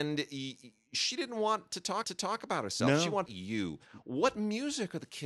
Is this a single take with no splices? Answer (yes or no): no